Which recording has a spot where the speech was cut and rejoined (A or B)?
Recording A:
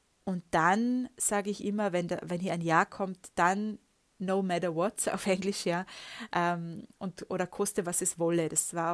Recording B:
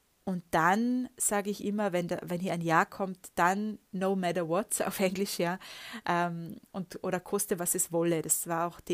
B